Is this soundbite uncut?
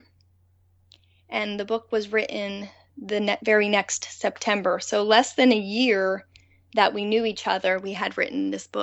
yes; 0 cuts

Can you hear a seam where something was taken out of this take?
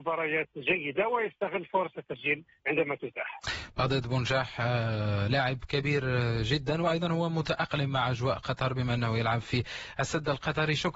no; 0 cuts

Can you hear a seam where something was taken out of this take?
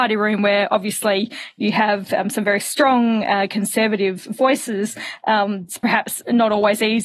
no; 0 cuts

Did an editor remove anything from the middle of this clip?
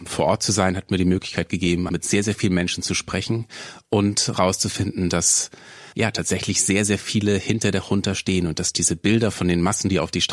yes; 2 cuts; at 1.9 s, 5.9 s

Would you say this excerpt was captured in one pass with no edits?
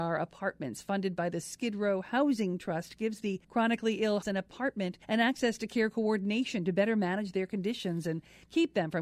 no; 3 cuts; at 3.4 s, 4.2 s, 5.0 s

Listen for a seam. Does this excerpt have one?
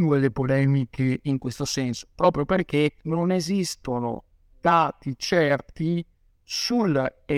yes; 1 cut; at 3.0 s

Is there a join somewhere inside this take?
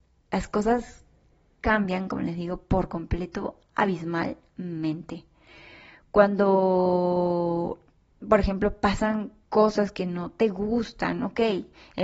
no; 0 cuts

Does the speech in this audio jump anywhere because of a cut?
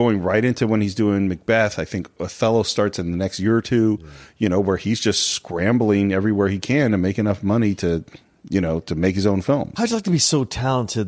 no; 0 cuts

